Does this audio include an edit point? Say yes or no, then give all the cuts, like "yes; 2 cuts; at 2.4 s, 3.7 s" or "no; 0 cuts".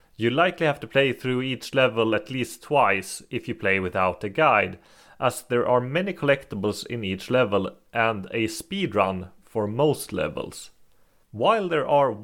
no; 0 cuts